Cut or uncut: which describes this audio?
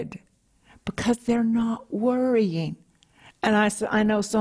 uncut